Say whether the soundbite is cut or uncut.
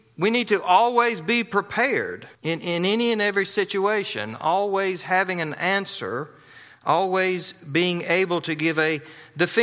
cut